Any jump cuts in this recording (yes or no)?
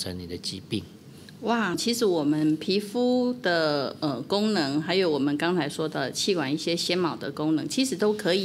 yes